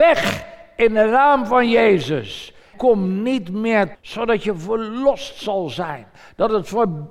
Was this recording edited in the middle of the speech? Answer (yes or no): yes